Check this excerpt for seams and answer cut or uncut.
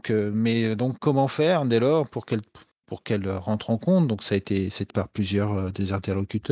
cut